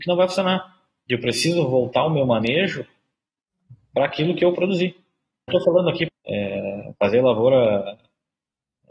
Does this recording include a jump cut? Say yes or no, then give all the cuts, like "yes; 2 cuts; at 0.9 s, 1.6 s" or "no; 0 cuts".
yes; 3 cuts; at 4.5 s, 5.5 s, 6.1 s